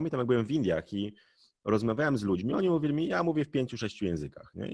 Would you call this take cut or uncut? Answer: uncut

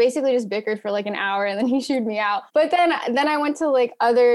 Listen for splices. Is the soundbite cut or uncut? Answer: cut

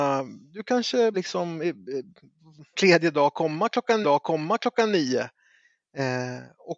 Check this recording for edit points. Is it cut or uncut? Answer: cut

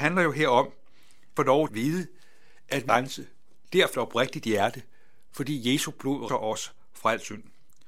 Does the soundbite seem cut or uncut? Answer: cut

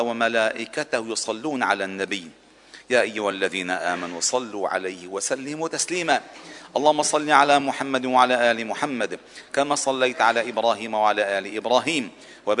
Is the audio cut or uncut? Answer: uncut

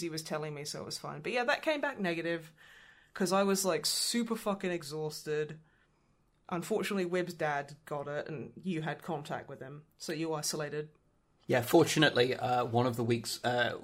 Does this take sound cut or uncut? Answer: uncut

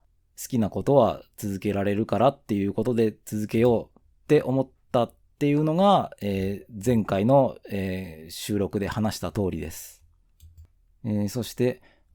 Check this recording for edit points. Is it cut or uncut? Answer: uncut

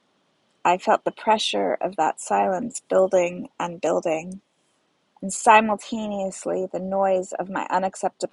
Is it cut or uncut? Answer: uncut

